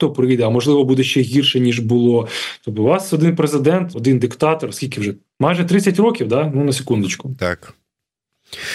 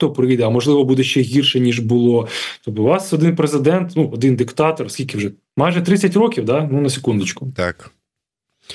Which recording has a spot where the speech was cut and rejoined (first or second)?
first